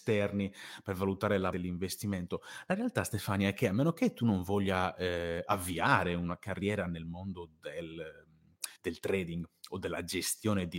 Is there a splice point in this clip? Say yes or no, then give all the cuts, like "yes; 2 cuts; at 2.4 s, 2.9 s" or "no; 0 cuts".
yes; 2 cuts; at 1.5 s, 8.7 s